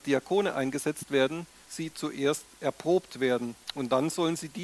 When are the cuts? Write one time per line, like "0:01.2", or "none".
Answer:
0:01.6
0:03.6